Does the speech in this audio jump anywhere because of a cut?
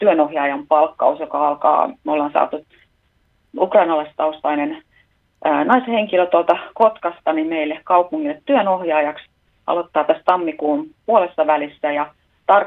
no; 0 cuts

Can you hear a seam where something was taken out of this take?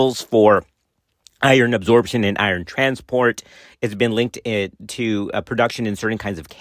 no; 0 cuts

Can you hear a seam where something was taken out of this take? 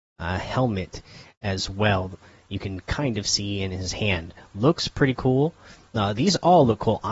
no; 0 cuts

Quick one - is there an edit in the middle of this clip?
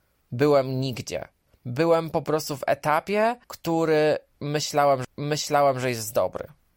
yes; 3 cuts; at 1.5 s, 3.4 s, 5.0 s

